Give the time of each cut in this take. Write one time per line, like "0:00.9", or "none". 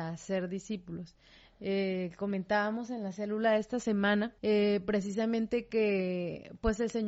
0:04.4